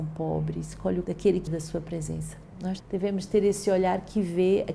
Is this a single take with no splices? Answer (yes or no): no